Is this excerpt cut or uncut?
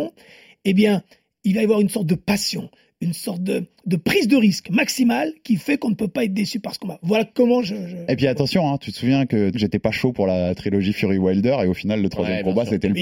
cut